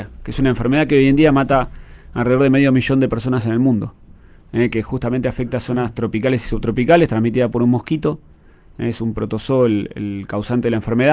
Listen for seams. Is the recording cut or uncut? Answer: uncut